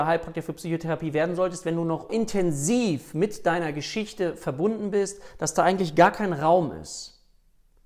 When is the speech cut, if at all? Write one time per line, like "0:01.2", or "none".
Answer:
0:02.1